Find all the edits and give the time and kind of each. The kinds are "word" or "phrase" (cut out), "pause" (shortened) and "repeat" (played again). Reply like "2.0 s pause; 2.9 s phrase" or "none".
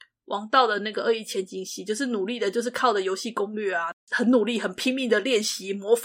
none